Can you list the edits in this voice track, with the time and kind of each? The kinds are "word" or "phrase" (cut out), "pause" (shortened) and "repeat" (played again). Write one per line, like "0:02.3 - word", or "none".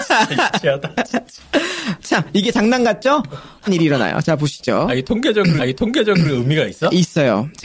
0:03.7 - word
0:05.6 - repeat

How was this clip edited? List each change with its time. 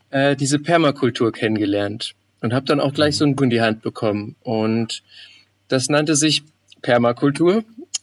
0:03.4 - word

